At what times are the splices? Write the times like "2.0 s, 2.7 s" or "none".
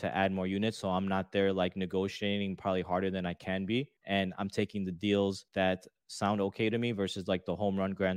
4.0 s, 5.5 s